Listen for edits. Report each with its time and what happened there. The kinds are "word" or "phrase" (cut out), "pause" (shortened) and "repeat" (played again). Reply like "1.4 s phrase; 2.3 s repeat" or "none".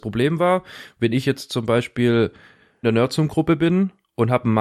2.8 s word